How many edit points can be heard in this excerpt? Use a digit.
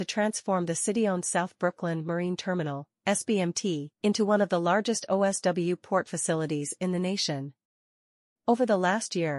1